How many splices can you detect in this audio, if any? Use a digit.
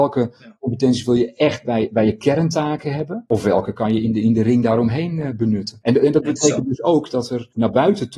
0